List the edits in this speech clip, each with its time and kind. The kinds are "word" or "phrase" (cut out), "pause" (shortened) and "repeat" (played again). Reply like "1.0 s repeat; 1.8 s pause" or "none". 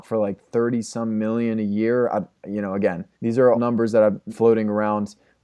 3.1 s pause; 3.5 s word; 4.3 s word

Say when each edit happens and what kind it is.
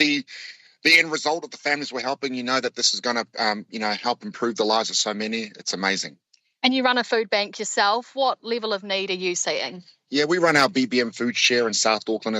none

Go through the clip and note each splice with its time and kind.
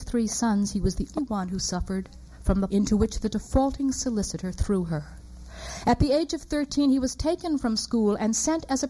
1.2 s word; 2.7 s word

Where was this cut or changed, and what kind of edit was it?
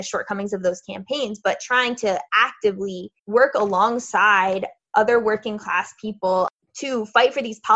3.2 s pause

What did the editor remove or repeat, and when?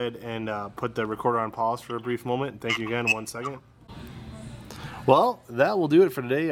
none

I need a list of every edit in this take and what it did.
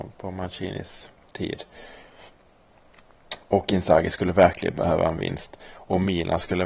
none

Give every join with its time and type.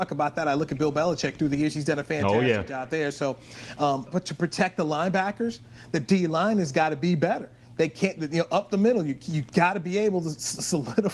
4.1 s word

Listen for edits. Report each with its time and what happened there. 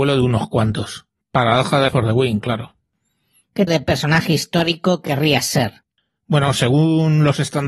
1.9 s word; 3.7 s word

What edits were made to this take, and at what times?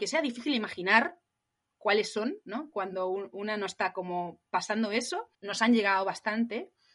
5.3 s pause

